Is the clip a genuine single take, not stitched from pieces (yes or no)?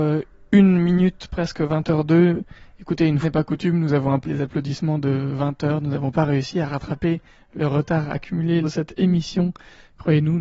no